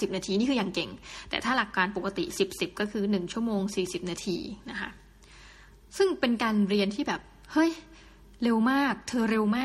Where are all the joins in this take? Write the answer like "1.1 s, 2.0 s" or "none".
none